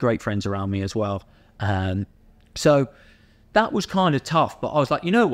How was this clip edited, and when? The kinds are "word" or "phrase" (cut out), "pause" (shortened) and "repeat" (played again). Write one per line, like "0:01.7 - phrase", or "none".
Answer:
0:02.2 - pause